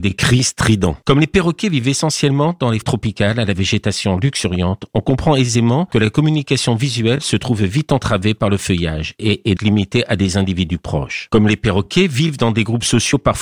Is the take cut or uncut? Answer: cut